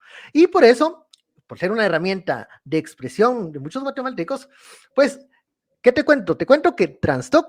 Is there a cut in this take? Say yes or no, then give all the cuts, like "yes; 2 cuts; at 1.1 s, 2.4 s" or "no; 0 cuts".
no; 0 cuts